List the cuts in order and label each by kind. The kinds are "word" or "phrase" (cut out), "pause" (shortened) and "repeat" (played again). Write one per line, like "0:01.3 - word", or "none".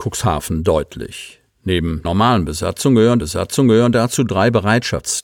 0:02.0 - word
0:03.2 - repeat